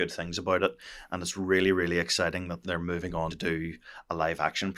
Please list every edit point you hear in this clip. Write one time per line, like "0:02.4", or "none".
0:02.6
0:03.3